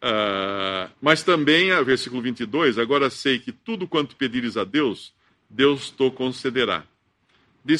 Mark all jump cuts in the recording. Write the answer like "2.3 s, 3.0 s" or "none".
1.0 s